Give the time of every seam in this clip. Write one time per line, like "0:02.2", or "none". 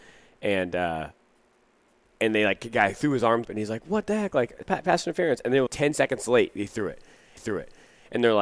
0:03.4
0:04.6
0:05.7
0:07.4